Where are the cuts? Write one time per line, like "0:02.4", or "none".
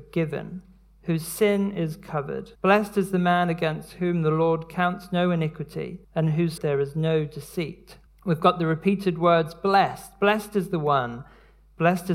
0:02.5
0:06.0
0:06.6
0:08.1